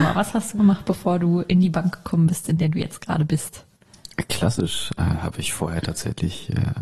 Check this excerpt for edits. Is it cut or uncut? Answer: uncut